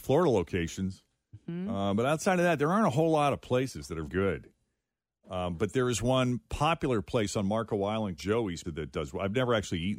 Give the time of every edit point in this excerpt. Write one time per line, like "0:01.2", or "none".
0:04.1
0:08.2
0:08.6